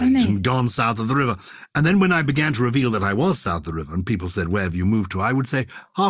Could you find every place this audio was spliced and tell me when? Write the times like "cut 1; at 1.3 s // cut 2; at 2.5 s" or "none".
none